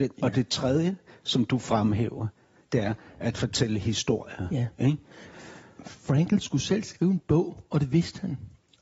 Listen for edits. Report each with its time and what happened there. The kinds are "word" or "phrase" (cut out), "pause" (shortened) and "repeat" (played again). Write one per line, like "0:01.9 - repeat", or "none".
none

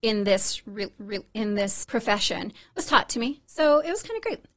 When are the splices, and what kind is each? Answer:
0:01.0 - repeat
0:01.8 - word

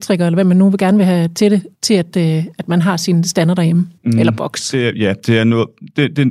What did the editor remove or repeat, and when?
0:01.7 - pause
0:04.0 - pause

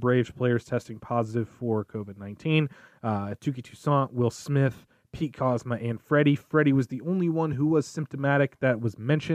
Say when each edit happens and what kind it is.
none

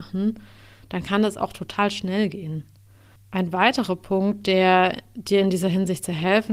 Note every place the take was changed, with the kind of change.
0:03.2 - pause

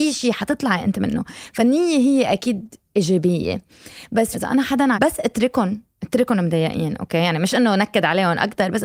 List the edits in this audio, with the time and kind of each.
0:02.8 - pause
0:04.3 - phrase
0:04.9 - phrase

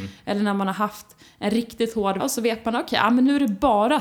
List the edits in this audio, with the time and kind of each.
0:02.2 - word

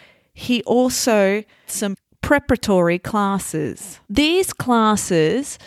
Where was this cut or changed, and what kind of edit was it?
0:01.7 - word
0:04.0 - pause

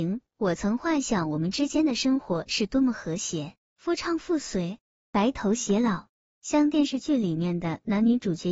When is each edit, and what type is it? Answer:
none

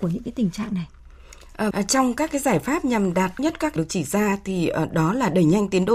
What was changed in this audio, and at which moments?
0:01.7 - word
0:03.4 - word
0:03.8 - phrase

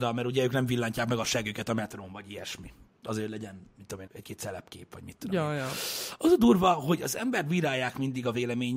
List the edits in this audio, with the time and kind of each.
0:02.9 - pause
0:04.1 - word

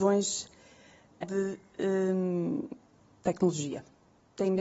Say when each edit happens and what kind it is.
0:01.2 - word

